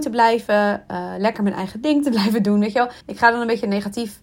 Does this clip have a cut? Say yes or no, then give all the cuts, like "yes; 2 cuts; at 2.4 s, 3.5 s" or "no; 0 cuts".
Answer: yes; 1 cut; at 3.0 s